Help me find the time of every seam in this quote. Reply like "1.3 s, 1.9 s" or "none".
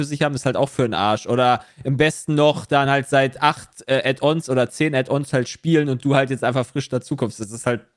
none